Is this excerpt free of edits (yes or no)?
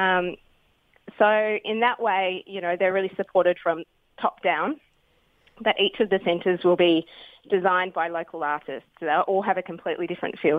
yes